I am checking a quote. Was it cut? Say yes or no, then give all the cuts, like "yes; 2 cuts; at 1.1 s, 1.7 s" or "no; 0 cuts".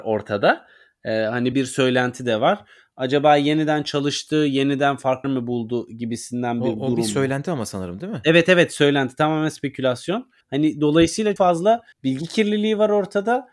yes; 5 cuts; at 1.5 s, 5.2 s, 10.4 s, 11.4 s, 11.9 s